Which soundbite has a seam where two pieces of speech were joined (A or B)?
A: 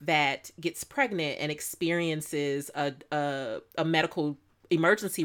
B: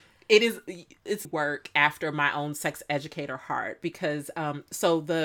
B